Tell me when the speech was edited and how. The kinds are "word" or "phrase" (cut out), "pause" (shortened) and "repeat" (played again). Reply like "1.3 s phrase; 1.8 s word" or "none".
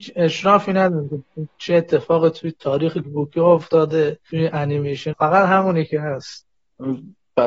3.0 s word; 5.1 s word

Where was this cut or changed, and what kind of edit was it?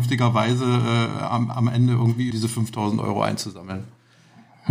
2.3 s phrase

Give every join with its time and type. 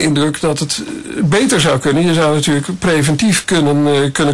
none

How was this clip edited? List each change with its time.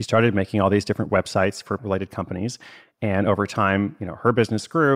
1.8 s word

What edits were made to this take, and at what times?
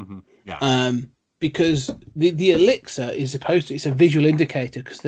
none

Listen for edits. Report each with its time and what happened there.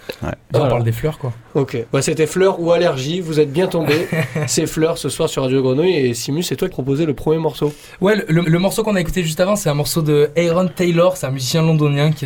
6.7 s phrase; 8.4 s repeat

